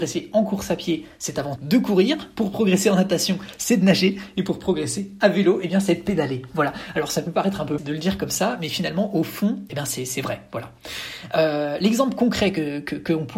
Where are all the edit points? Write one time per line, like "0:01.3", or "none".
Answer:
0:01.6
0:07.8
0:09.7